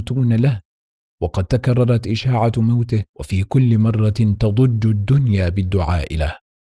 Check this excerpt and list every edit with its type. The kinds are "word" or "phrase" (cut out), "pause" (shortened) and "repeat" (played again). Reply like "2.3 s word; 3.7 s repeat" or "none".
3.1 s pause